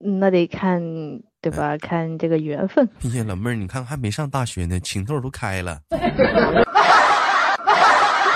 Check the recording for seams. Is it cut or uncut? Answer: cut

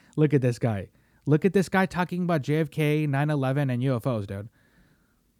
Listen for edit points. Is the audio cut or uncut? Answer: uncut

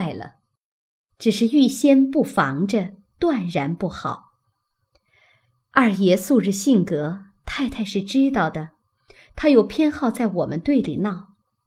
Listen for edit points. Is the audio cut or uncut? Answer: uncut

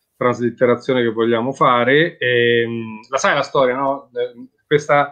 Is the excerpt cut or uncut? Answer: uncut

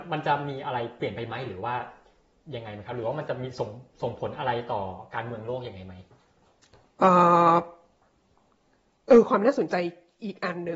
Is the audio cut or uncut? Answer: uncut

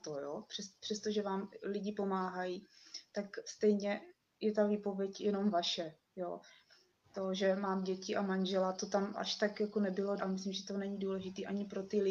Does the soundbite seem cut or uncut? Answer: cut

